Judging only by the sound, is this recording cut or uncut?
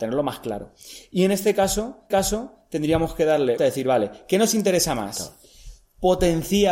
cut